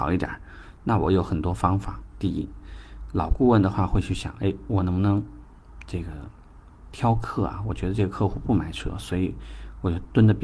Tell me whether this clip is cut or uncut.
uncut